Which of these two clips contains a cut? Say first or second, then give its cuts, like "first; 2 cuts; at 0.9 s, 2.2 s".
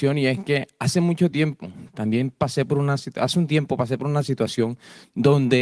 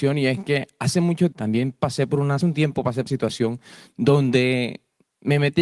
second; 3 cuts; at 1.3 s, 2.4 s, 3.1 s